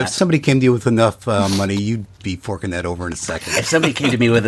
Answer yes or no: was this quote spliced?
no